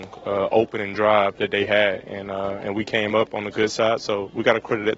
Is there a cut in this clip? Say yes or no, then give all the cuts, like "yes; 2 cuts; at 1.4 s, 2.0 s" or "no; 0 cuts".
no; 0 cuts